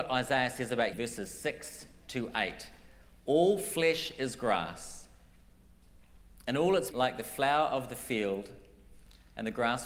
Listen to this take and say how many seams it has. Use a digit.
2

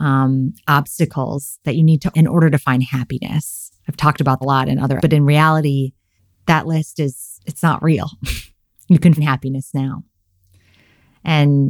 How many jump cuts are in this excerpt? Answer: 7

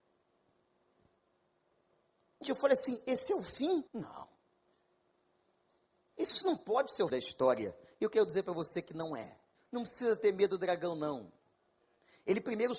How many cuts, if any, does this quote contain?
4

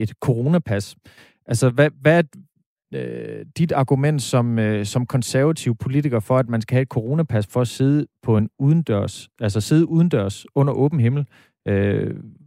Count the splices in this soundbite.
0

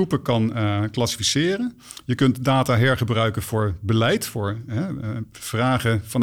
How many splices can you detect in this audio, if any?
0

